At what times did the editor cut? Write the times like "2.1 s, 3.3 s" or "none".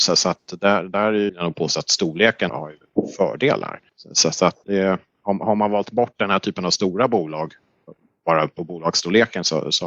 1.3 s, 2.5 s, 3.9 s, 4.6 s